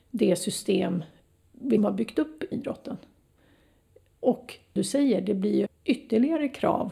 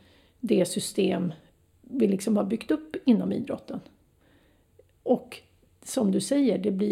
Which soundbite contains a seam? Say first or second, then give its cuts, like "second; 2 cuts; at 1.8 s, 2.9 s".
first; 4 cuts; at 1.8 s, 2.5 s, 4.8 s, 5.7 s